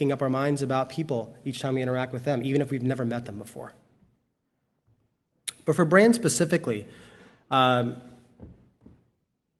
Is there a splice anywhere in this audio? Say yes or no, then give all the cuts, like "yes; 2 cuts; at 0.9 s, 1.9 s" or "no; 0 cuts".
no; 0 cuts